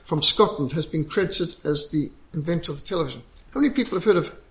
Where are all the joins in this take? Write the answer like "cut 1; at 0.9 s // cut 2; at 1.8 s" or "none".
none